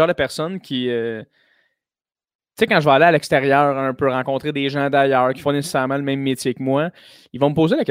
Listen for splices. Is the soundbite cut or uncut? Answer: cut